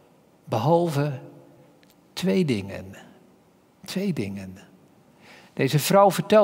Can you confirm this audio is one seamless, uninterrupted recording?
yes; 0 cuts

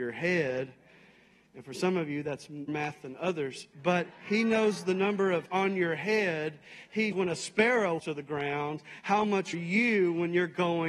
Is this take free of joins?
no; 6 cuts; at 2.7 s, 3.7 s, 5.5 s, 7.1 s, 8.0 s, 9.5 s

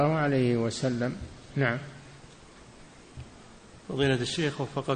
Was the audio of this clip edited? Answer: no; 0 cuts

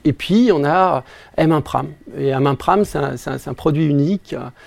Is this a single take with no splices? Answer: yes; 0 cuts

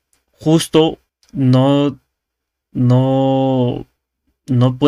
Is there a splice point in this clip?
yes; 1 cut; at 1.1 s

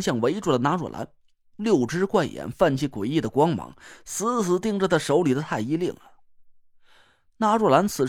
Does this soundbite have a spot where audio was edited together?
no; 0 cuts

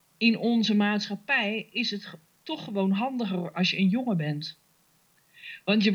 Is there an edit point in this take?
no; 0 cuts

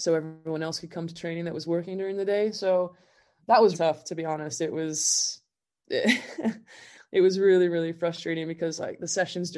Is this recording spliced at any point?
yes; 2 cuts; at 3.4 s, 3.7 s

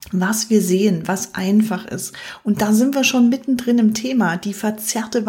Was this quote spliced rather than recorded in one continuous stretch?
no; 0 cuts

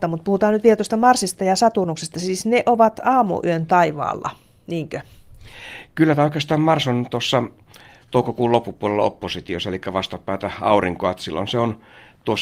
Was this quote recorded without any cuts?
yes; 0 cuts

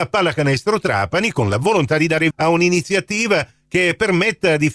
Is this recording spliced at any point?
yes; 1 cut; at 2.3 s

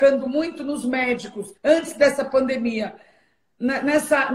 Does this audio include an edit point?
yes; 1 cut; at 1.6 s

